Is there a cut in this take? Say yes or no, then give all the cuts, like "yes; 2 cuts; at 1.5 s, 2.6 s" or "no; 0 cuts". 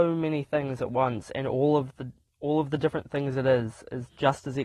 no; 0 cuts